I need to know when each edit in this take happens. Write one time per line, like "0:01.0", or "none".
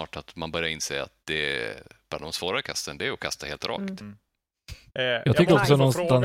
0:01.2
0:04.9